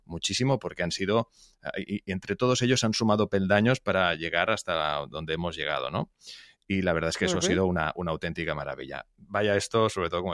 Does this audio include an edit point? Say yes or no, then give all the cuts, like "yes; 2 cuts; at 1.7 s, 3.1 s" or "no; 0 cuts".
no; 0 cuts